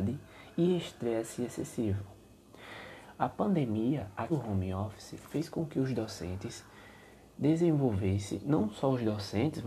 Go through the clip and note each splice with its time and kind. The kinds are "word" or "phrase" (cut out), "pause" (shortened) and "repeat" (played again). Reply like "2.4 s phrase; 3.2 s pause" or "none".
4.3 s word

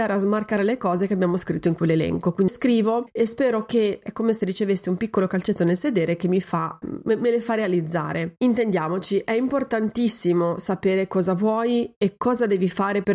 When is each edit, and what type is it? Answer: 2.5 s word; 4.0 s word; 6.8 s word

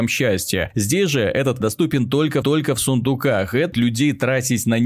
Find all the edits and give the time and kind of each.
1.6 s word; 2.4 s repeat; 3.7 s phrase

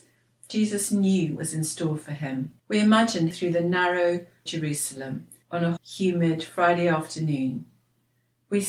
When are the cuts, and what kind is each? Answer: 1.4 s word; 2.6 s pause; 3.3 s phrase; 4.5 s phrase; 5.4 s pause; 5.8 s word

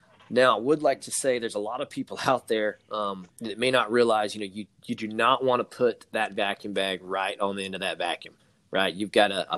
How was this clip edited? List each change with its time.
3.3 s pause

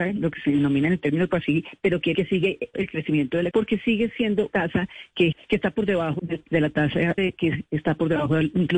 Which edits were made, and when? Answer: 1.3 s word; 2.1 s word; 2.7 s word; 3.5 s word; 4.5 s word; 5.3 s word; 6.2 s word; 7.2 s word

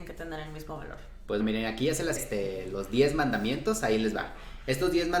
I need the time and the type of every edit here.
1.4 s word; 2.2 s word

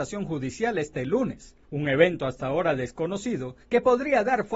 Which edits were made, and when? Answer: 1.6 s pause; 3.6 s pause

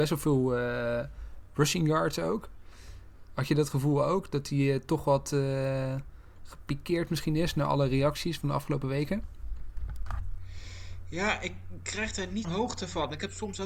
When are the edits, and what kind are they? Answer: 12.4 s word

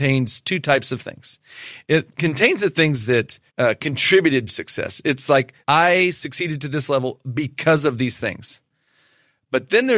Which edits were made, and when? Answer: 3.5 s pause; 4.5 s phrase; 5.6 s pause

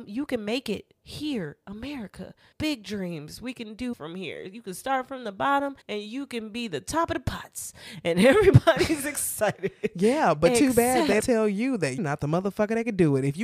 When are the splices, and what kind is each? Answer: 1.0 s pause; 2.5 s pause; 3.9 s word; 5.8 s pause; 11.2 s word; 12.0 s word

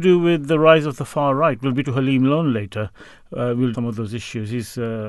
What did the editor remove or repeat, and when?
1.8 s word; 3.7 s word

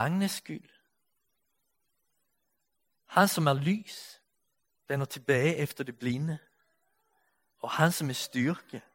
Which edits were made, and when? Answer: none

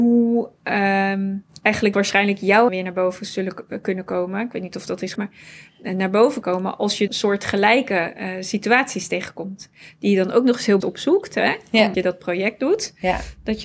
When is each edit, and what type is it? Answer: 1.9 s word; 2.7 s word; 5.2 s word; 6.4 s word; 7.1 s word; 10.8 s word; 11.9 s word

